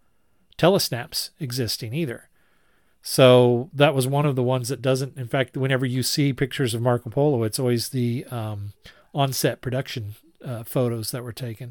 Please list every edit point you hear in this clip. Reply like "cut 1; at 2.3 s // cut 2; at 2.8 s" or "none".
none